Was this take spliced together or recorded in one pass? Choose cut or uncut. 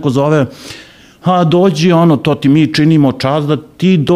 uncut